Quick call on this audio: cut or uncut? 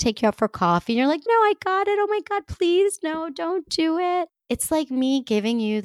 cut